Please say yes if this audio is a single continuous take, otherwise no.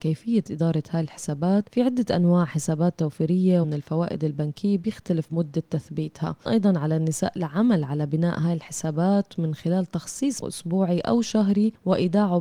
no